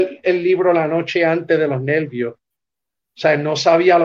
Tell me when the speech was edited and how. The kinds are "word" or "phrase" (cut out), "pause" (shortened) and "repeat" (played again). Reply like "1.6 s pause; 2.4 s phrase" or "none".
none

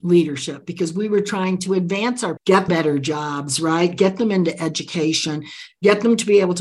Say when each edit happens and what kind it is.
2.4 s word; 2.7 s word

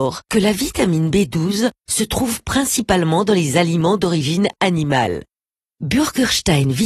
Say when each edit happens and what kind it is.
none

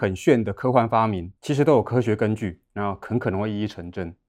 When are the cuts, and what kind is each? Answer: 1.4 s pause

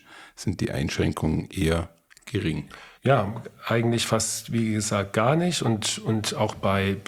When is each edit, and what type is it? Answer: 2.9 s pause

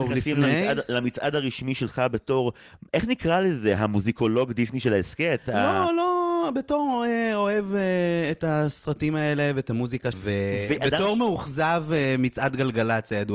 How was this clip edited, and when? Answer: 10.1 s word

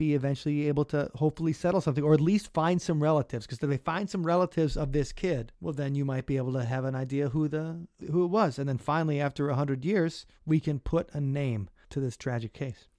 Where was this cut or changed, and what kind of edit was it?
10.4 s pause

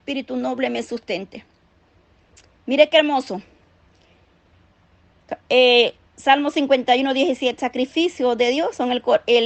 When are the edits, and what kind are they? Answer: 7.6 s word

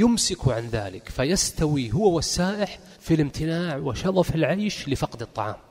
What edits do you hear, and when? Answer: 3.0 s pause

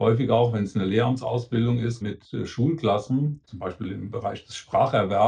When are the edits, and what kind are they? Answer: 2.0 s word; 3.4 s word

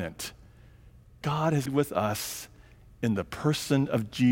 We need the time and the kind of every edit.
1.2 s word; 1.7 s word

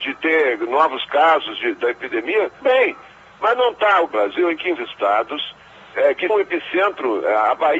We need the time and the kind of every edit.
2.6 s word; 4.1 s phrase; 4.8 s word; 6.3 s word

